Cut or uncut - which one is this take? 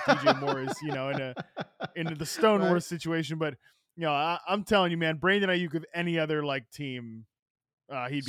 uncut